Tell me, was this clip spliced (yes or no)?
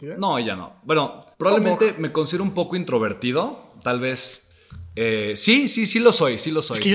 yes